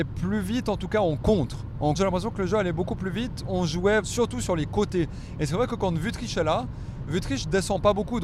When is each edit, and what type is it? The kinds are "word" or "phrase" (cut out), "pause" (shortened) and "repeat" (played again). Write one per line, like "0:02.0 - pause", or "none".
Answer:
0:01.9 - word
0:04.0 - word